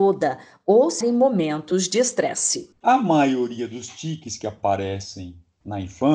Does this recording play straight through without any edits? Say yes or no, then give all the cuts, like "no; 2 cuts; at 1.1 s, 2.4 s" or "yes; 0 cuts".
no; 1 cut; at 1.0 s